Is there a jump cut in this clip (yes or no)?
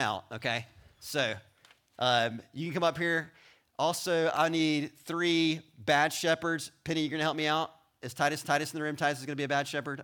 yes